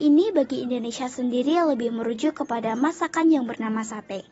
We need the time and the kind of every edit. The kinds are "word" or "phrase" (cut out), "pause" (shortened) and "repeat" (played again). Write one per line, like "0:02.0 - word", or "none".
none

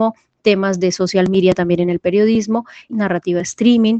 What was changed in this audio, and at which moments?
0:02.9 - word

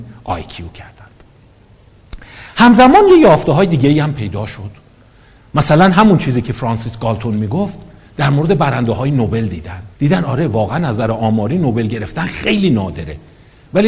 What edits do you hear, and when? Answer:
0:09.9 - pause

